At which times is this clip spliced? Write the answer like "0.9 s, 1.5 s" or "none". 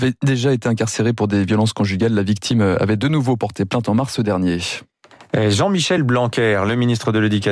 none